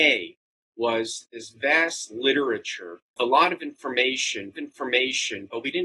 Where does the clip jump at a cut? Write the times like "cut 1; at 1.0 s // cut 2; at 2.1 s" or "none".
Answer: cut 1; at 3.2 s // cut 2; at 4.5 s